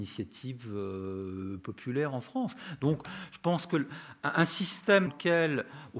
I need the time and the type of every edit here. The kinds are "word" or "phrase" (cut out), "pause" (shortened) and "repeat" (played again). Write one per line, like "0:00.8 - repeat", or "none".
0:05.1 - word